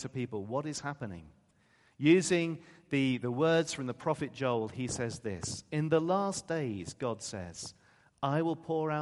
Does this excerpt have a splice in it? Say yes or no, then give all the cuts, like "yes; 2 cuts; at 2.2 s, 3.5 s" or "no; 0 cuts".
no; 0 cuts